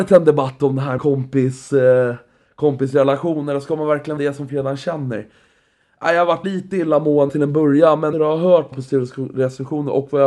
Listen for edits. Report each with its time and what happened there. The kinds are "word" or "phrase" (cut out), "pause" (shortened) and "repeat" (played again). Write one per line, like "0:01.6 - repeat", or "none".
0:01.0 - word
0:04.2 - word
0:04.5 - word
0:06.4 - word
0:07.3 - word
0:08.1 - word
0:08.7 - word